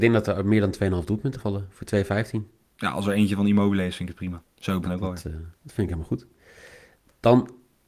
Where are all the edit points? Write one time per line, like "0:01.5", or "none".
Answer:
0:01.4
0:02.6
0:04.5
0:04.8
0:05.6